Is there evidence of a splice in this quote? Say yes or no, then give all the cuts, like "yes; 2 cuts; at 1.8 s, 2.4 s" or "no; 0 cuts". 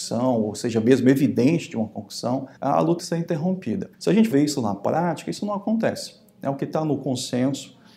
yes; 4 cuts; at 2.6 s, 3.0 s, 3.9 s, 4.3 s